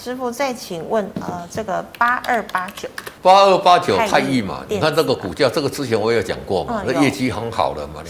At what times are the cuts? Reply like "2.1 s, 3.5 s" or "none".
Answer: 3.2 s